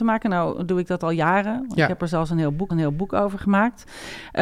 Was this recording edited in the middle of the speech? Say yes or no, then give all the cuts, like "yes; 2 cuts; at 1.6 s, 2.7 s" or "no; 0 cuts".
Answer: yes; 1 cut; at 2.7 s